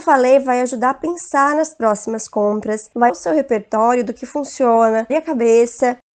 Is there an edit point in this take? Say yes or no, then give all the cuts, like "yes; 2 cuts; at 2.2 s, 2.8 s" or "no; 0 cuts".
yes; 2 cuts; at 3.1 s, 5.1 s